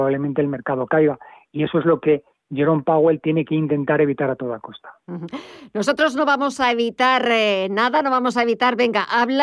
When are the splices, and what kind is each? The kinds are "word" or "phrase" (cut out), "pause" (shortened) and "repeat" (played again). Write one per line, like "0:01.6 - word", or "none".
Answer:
none